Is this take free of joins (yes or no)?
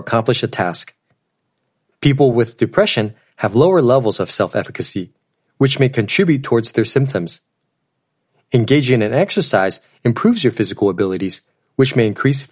yes